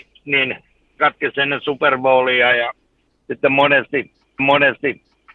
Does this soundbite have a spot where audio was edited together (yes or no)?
yes